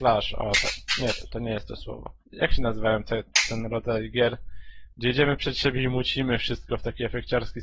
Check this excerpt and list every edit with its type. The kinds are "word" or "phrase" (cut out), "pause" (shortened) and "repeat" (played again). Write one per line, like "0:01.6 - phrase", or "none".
0:01.3 - word
0:02.2 - pause